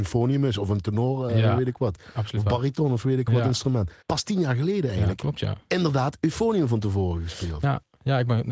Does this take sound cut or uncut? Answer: cut